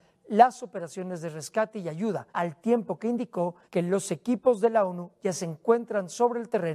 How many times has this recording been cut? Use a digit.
2